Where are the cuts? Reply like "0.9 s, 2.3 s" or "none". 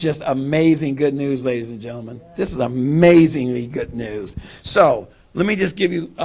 none